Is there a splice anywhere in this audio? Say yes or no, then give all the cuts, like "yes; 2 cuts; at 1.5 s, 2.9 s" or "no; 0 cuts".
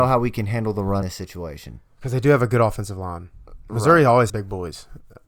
yes; 3 cuts; at 1.0 s, 1.9 s, 4.3 s